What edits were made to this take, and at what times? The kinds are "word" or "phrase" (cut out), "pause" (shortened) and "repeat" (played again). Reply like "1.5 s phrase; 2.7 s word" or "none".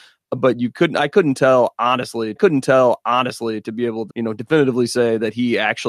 2.4 s repeat; 4.1 s word